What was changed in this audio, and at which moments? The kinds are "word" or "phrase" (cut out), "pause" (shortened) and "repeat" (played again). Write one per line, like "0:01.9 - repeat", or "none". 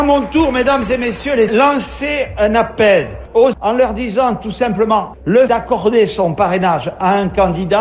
0:01.5 - phrase
0:03.5 - word
0:05.5 - word